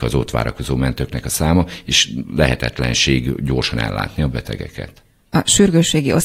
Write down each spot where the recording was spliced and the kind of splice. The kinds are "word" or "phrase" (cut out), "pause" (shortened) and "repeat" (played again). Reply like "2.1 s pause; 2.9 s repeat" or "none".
none